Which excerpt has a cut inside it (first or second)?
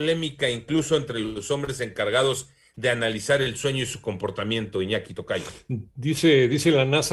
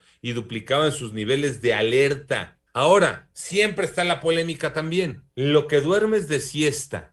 second